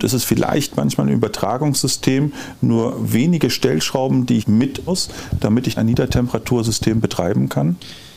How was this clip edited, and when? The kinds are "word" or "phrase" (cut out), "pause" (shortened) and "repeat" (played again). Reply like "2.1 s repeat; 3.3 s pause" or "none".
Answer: 4.4 s word; 4.9 s word; 5.8 s word

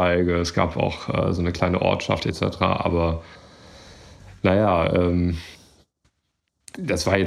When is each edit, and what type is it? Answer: none

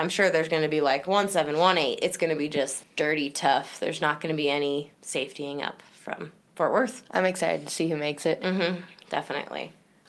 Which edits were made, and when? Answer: 4.9 s pause

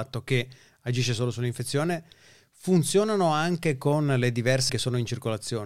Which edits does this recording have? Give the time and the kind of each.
4.7 s word

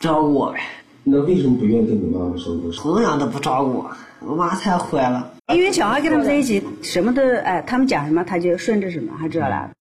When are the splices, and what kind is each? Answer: 5.4 s pause

